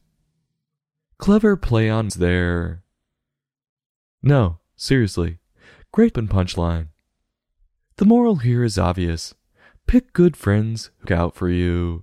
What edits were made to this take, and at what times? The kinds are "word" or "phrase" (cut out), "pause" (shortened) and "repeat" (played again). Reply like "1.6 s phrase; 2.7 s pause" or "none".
2.1 s word; 6.1 s word; 11.0 s word